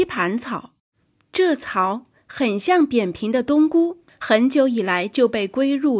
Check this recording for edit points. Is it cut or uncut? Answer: cut